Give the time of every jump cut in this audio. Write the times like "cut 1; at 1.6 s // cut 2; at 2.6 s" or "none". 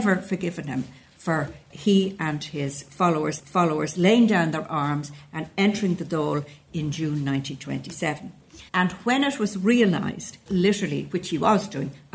cut 1; at 1.7 s // cut 2; at 3.4 s // cut 3; at 8.7 s // cut 4; at 10.5 s